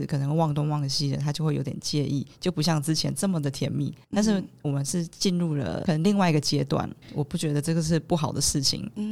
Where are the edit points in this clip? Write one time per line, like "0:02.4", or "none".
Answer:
0:04.0
0:07.0